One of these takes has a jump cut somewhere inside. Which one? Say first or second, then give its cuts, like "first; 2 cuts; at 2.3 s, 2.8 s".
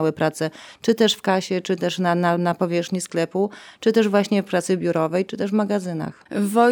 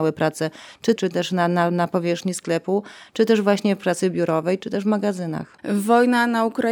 second; 1 cut; at 1.0 s